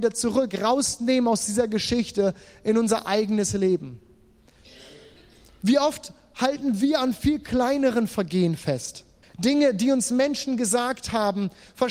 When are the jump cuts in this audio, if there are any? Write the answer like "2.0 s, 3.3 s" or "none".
9.2 s